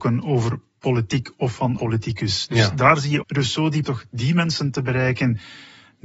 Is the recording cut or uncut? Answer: cut